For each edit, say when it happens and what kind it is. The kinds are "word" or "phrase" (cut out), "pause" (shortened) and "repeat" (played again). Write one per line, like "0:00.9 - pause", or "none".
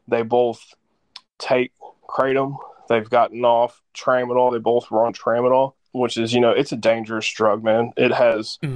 0:01.3 - pause